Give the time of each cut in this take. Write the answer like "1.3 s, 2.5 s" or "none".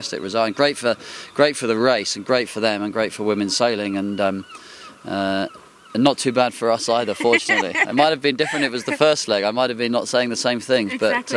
none